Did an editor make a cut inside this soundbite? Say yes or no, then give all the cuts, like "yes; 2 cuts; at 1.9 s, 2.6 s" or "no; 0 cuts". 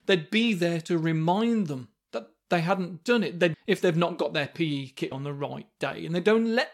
yes; 2 cuts; at 3.5 s, 5.1 s